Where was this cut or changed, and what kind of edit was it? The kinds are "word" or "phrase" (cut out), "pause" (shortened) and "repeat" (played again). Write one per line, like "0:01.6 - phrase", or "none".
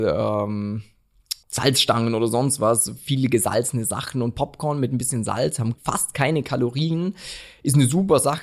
0:01.4 - pause
0:05.8 - word